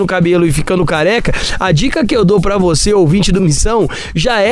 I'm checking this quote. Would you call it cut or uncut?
uncut